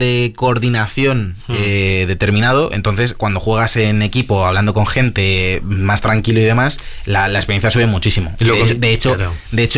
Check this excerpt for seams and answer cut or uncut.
uncut